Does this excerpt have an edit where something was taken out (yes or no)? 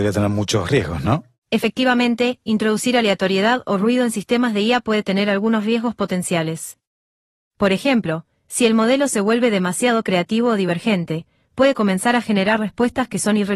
no